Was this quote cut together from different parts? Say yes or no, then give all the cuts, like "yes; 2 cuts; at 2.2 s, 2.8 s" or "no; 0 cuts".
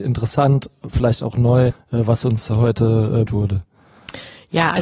yes; 2 cuts; at 1.7 s, 3.3 s